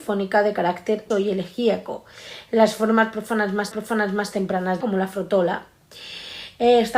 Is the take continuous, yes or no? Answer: no